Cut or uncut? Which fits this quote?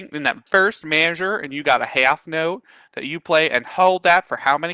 uncut